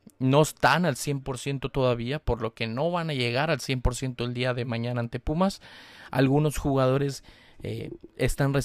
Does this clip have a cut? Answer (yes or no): no